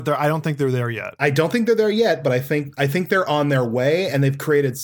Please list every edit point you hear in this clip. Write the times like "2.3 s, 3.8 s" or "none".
none